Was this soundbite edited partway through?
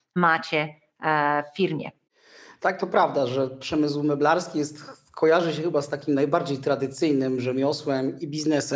no; 0 cuts

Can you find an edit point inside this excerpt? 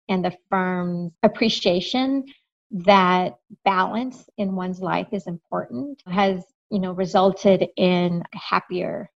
yes; 1 cut; at 1.1 s

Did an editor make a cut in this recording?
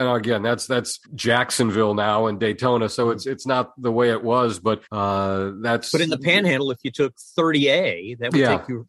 yes; 2 cuts; at 1.0 s, 4.9 s

